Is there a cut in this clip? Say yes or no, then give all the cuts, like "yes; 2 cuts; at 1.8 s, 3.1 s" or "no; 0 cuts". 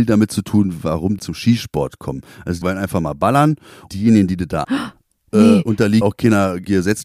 yes; 5 cuts; at 1.2 s, 2.6 s, 3.9 s, 4.6 s, 6.0 s